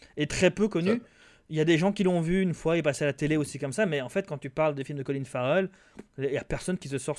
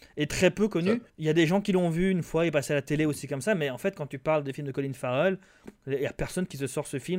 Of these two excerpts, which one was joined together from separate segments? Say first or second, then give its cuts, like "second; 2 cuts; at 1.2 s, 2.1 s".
second; 1 cut; at 1.1 s